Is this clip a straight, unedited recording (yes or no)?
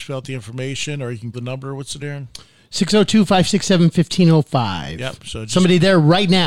no